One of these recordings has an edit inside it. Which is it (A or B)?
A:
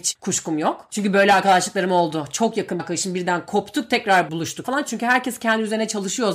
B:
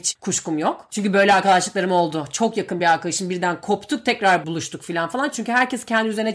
A